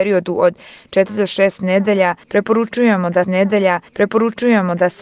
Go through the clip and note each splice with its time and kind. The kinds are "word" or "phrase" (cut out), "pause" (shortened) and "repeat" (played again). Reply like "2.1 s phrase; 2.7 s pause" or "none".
3.2 s repeat